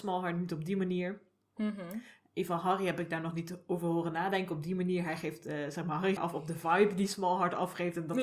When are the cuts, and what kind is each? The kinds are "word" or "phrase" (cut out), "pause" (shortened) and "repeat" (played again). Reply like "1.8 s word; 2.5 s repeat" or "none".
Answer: 6.2 s phrase